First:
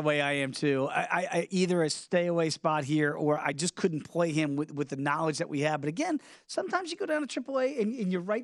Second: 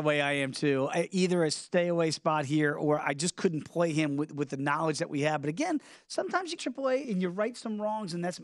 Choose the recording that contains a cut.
second; 3 cuts; at 0.9 s, 6.6 s, 7.0 s

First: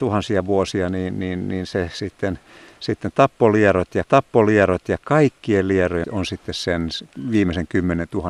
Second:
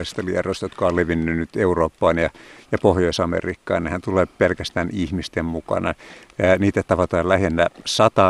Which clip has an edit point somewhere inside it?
first; 2 cuts; at 4.1 s, 6.0 s

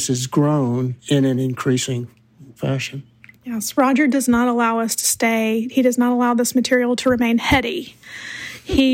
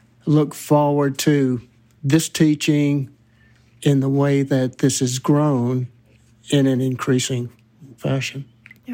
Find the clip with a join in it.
first; 1 cut; at 1.0 s

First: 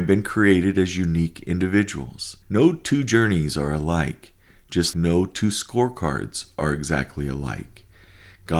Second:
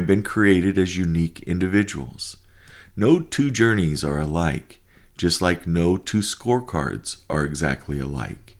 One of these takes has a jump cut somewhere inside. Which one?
first; 2 cuts; at 2.4 s, 4.9 s

